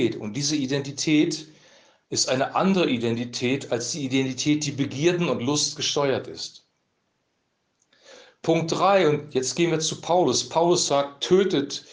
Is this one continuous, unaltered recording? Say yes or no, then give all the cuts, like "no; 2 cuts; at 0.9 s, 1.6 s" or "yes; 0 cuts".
yes; 0 cuts